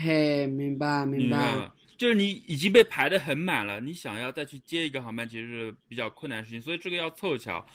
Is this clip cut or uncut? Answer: cut